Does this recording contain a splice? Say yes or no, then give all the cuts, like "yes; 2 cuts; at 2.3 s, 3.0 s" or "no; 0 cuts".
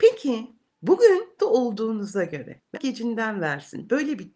yes; 2 cuts; at 1.4 s, 2.7 s